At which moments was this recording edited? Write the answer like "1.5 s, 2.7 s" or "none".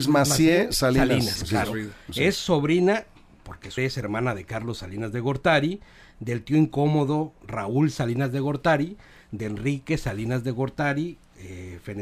1.4 s, 3.8 s

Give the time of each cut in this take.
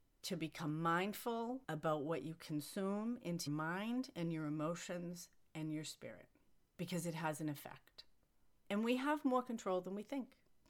3.5 s

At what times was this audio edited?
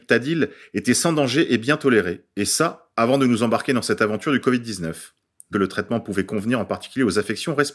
5.5 s

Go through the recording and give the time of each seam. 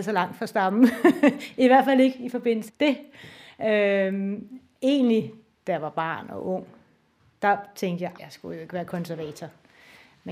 2.7 s, 8.2 s

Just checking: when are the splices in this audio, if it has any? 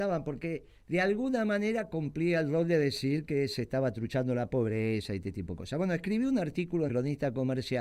6.9 s

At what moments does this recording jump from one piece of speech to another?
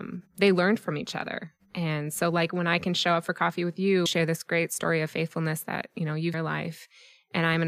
4.1 s, 6.3 s

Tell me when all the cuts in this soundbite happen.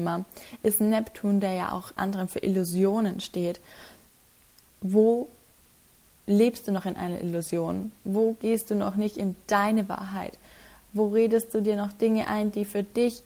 2.0 s, 4.6 s

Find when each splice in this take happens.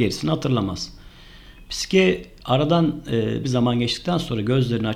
3.4 s

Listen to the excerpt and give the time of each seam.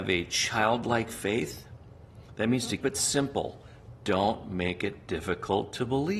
2.8 s

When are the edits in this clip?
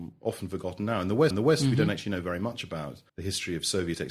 1.3 s, 3.1 s

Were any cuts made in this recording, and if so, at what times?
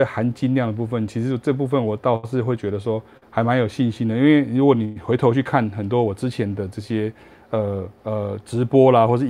3.2 s, 8.0 s

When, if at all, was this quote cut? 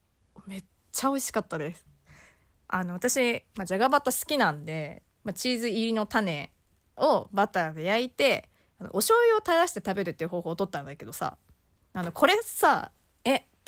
none

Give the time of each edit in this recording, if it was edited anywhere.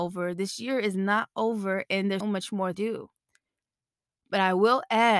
2.2 s, 2.7 s

